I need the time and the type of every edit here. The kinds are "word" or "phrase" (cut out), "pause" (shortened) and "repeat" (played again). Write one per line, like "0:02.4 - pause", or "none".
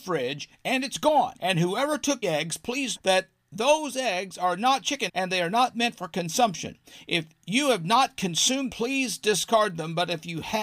0:01.4 - pause
0:02.2 - word
0:03.0 - word
0:05.1 - word
0:08.7 - word